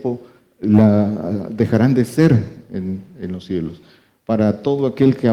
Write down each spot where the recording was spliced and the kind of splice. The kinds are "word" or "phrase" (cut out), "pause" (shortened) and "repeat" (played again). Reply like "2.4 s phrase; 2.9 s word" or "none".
none